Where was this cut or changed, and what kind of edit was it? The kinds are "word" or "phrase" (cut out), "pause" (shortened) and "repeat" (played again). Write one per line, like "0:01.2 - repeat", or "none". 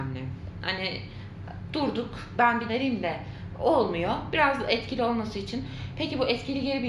0:02.3 - word
0:02.7 - phrase